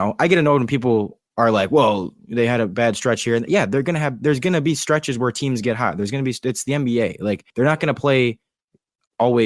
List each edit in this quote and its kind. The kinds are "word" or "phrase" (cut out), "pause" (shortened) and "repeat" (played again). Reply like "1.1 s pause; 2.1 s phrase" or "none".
2.2 s pause; 7.5 s pause